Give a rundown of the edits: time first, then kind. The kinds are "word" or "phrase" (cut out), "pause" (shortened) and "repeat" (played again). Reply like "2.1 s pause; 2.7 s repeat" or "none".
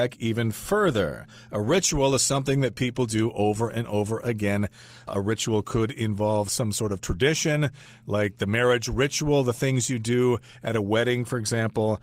none